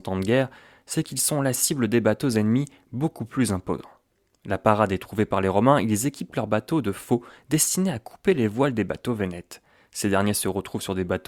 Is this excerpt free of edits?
yes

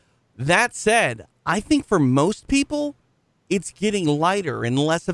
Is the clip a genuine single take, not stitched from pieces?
yes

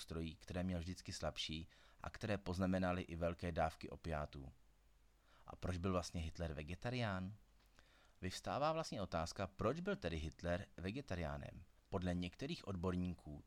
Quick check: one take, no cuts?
yes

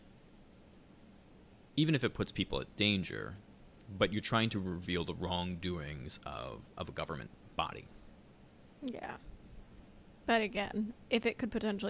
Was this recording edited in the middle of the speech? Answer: no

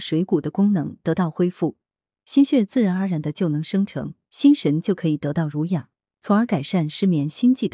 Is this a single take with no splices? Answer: yes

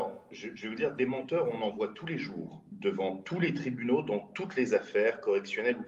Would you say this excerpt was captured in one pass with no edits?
yes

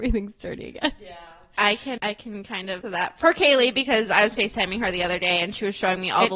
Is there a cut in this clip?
yes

